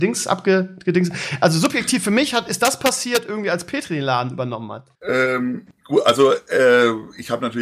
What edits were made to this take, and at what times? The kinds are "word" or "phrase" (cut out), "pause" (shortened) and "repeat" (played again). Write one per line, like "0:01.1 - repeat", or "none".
0:04.9 - pause